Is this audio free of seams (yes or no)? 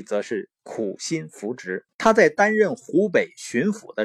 no